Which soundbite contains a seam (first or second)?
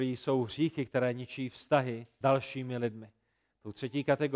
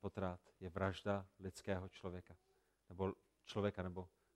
first